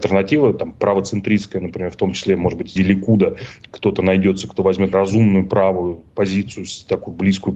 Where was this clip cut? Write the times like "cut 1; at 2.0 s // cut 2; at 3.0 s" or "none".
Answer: cut 1; at 2.8 s // cut 2; at 4.9 s